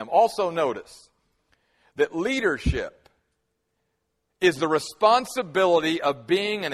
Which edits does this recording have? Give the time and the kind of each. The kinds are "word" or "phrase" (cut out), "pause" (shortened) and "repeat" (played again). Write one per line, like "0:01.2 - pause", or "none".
none

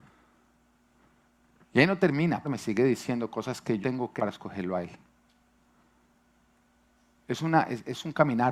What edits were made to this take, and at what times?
0:02.4 - phrase
0:03.8 - word
0:04.2 - word

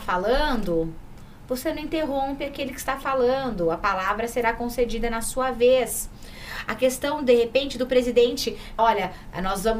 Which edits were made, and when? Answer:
0:08.8 - word

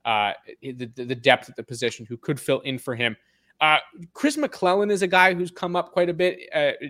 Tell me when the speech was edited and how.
none

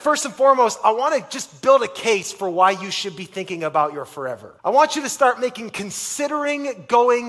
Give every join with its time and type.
0:04.6 - pause

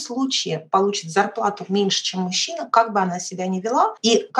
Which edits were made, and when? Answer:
none

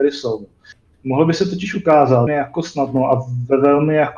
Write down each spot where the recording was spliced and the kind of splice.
0:02.3 - word

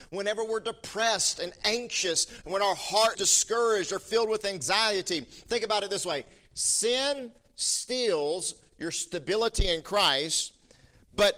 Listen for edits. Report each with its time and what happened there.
0:03.1 - word

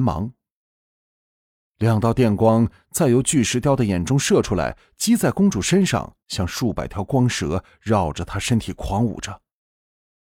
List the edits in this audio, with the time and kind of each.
0:06.2 - pause

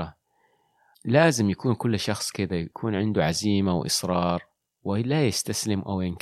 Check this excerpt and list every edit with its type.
0:02.7 - pause
0:04.6 - pause

